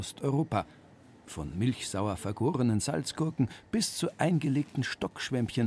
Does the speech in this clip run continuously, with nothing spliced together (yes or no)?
yes